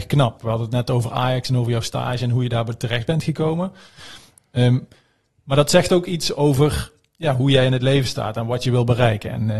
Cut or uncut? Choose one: uncut